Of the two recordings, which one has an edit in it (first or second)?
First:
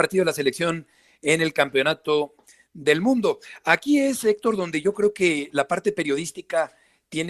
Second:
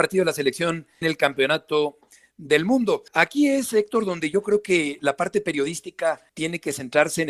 second